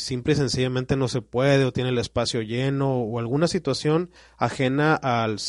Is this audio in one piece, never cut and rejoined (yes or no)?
no